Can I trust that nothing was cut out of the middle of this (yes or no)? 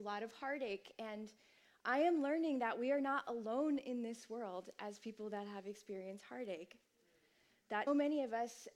no